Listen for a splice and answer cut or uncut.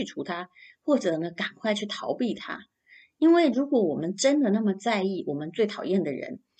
uncut